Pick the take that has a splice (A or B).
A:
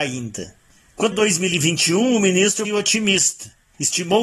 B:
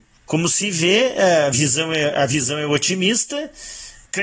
A